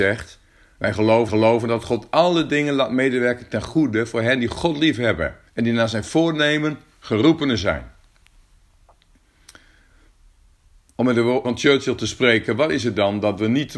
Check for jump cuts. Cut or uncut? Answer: cut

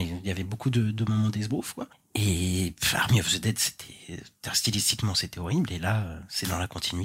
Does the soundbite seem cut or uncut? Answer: uncut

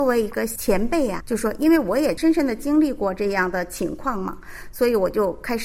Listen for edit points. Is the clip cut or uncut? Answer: cut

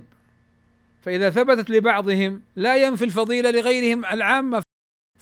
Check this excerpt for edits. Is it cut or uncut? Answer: cut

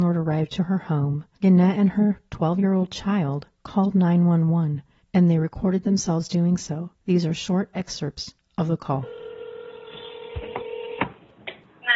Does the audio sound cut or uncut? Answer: cut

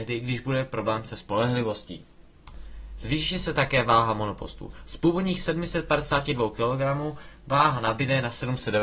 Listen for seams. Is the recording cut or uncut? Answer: uncut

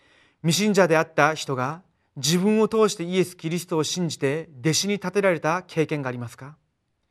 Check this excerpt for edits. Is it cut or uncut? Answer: uncut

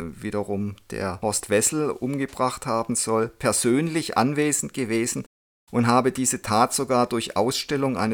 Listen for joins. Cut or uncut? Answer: uncut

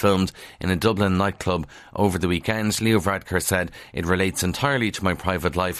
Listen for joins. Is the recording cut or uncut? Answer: uncut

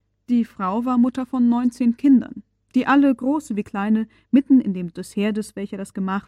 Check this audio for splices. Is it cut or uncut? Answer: cut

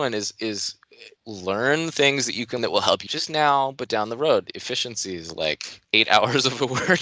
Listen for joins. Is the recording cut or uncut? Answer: cut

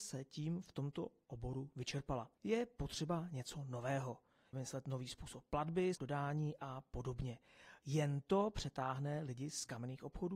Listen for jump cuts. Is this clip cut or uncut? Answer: cut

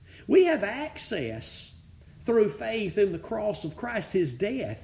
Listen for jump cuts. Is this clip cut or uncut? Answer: uncut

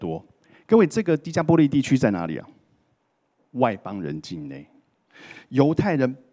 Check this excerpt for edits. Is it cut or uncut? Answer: uncut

